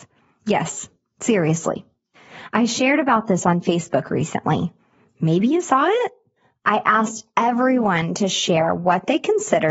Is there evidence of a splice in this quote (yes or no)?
no